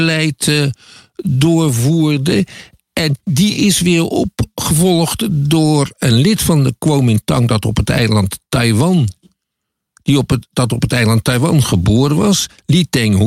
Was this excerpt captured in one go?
yes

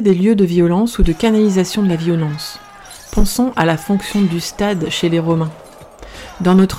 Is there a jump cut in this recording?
no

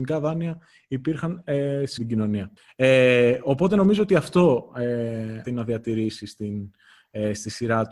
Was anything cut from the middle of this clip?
yes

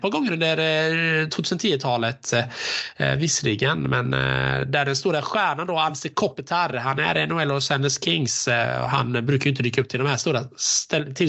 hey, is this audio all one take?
yes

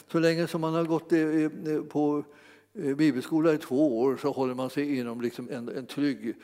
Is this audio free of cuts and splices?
no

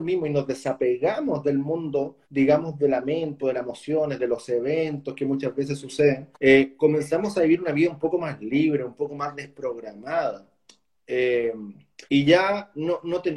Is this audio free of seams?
no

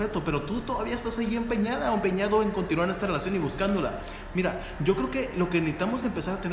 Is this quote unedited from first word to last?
yes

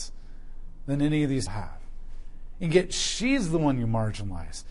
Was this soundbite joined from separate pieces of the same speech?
yes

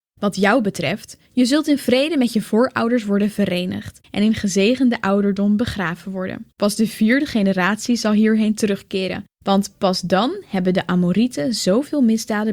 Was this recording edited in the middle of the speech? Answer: yes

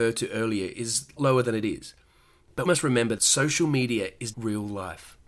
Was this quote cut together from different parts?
yes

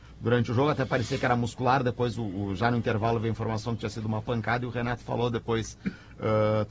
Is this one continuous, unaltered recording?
yes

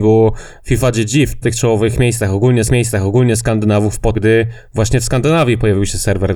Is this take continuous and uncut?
no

